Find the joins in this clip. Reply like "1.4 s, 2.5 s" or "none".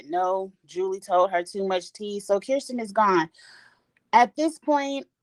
none